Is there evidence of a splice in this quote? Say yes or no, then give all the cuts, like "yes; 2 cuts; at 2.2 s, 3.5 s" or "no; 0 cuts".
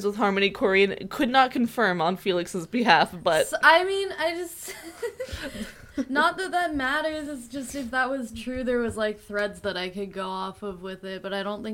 no; 0 cuts